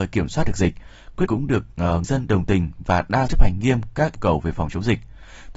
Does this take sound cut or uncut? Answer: cut